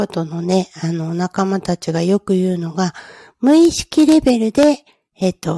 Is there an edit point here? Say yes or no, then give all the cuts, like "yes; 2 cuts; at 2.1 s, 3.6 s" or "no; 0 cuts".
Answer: no; 0 cuts